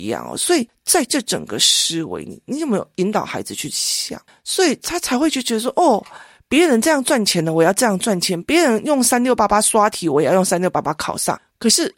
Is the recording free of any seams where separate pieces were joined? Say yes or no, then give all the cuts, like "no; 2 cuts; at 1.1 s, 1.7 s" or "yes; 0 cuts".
yes; 0 cuts